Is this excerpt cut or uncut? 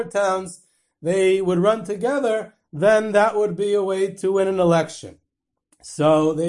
uncut